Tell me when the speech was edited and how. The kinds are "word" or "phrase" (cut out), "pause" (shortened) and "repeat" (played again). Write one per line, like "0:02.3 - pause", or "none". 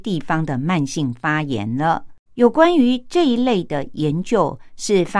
0:02.3 - pause